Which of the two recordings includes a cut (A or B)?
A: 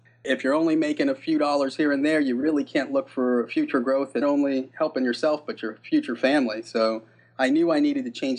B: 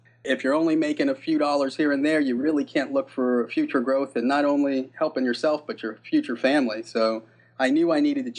A